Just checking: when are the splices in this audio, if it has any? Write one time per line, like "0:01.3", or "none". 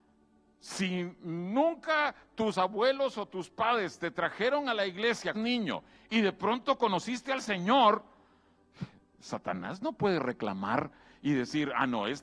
0:05.3